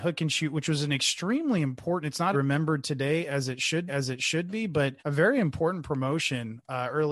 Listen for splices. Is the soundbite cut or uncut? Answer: cut